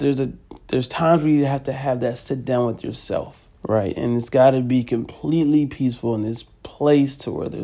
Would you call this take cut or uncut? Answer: cut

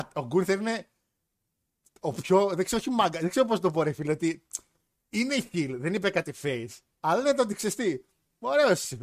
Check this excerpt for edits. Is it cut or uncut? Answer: uncut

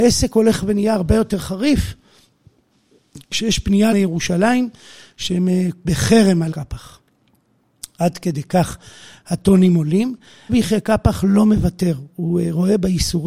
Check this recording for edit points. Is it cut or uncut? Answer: cut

